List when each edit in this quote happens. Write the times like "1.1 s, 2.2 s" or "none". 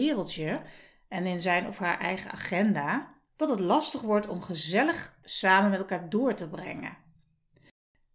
3.3 s, 5.2 s